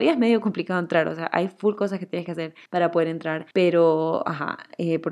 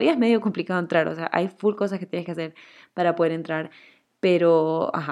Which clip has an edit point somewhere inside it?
first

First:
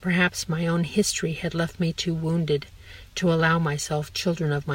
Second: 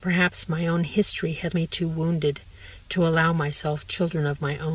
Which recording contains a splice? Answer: second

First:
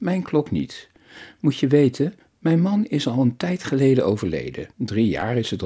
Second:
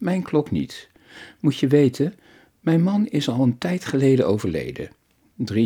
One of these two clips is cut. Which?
first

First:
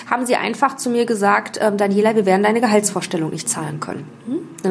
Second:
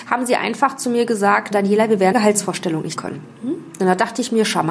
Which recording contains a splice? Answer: second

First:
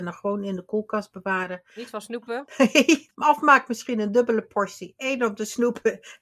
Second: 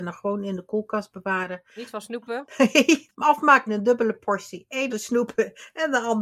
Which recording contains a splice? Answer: second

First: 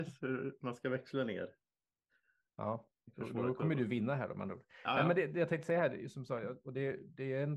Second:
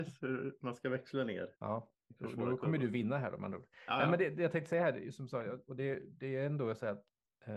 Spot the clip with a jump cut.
second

